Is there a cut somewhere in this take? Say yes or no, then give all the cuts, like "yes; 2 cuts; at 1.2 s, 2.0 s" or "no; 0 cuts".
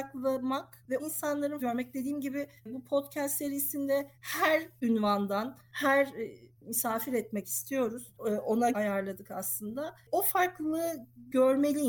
yes; 6 cuts; at 1.0 s, 1.6 s, 2.6 s, 4.1 s, 6.6 s, 8.7 s